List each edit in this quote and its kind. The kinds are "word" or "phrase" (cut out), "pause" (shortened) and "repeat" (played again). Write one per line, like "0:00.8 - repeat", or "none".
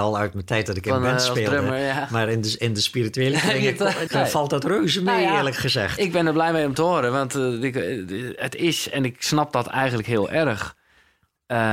0:04.1 - phrase